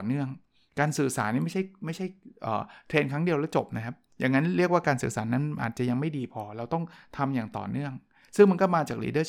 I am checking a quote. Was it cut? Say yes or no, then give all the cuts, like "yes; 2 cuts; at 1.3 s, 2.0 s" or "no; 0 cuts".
no; 0 cuts